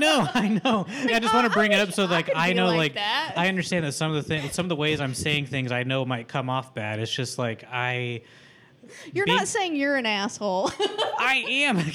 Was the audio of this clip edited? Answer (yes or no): yes